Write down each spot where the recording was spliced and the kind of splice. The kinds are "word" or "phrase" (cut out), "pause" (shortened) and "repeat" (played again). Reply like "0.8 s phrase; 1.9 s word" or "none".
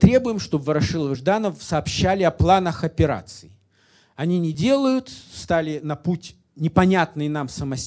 none